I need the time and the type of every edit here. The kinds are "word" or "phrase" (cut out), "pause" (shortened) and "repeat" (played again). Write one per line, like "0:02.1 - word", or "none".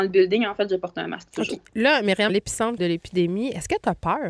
0:02.3 - phrase
0:02.8 - phrase